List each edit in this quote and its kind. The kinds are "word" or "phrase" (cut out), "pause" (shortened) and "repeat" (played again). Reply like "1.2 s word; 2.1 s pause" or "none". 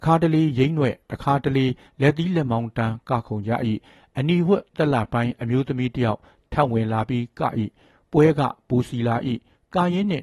none